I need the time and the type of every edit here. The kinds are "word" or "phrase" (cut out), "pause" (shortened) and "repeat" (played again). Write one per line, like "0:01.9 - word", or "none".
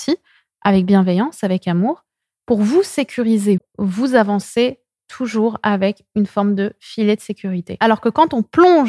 0:03.6 - word